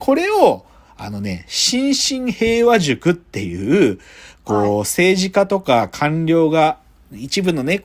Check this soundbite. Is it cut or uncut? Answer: uncut